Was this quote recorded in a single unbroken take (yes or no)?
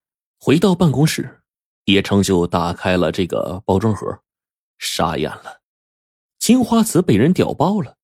yes